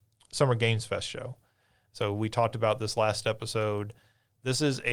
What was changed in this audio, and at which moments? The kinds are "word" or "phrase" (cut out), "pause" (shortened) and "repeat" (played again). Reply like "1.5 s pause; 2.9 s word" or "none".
none